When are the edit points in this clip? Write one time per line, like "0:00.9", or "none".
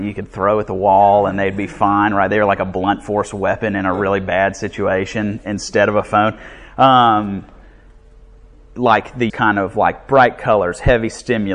0:09.3